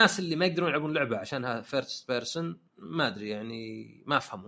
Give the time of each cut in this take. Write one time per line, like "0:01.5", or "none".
0:02.7